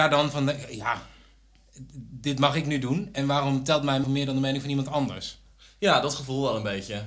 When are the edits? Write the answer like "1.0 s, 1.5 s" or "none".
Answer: 4.0 s